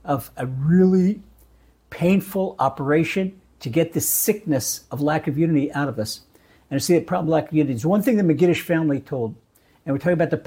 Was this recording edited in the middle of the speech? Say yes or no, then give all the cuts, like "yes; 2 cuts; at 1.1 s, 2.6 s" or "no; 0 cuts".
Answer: no; 0 cuts